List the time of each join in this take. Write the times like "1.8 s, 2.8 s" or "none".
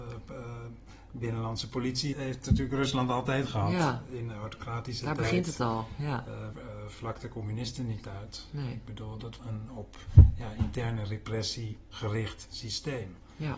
2.1 s, 6.5 s, 9.4 s